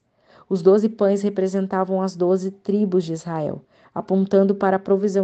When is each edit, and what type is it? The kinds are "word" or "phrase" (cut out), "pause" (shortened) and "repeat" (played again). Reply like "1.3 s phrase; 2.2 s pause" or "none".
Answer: none